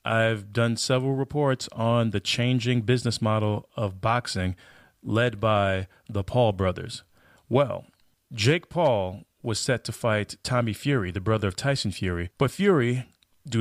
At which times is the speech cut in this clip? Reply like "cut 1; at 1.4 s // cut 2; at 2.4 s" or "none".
none